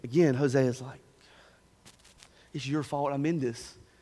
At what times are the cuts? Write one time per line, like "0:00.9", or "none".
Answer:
none